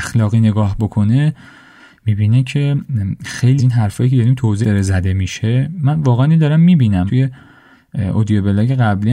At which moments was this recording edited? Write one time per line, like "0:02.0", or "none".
0:03.6
0:04.6
0:07.1